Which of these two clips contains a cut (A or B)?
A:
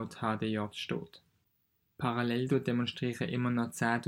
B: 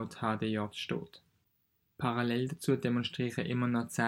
A